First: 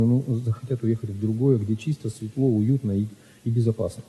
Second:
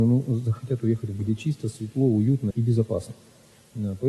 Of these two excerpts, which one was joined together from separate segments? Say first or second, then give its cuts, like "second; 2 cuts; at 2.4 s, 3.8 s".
second; 2 cuts; at 1.2 s, 2.5 s